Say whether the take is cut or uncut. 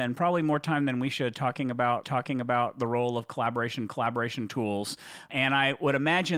cut